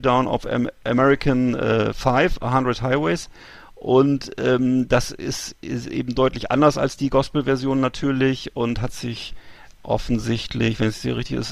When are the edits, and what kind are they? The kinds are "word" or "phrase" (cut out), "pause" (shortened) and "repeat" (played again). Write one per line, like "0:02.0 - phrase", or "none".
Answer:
none